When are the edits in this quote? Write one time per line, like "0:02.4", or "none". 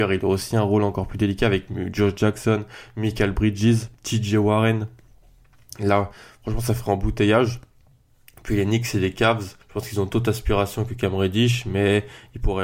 0:09.6